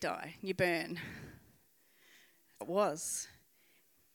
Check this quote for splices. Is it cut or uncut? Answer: cut